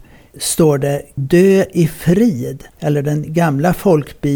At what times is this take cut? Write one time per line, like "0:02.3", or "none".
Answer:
0:01.2
0:02.7